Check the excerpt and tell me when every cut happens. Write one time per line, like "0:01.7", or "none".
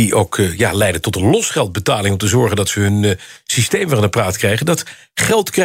none